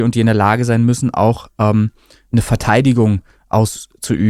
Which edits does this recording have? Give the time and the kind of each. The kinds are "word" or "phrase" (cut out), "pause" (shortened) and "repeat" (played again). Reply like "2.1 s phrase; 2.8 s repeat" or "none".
none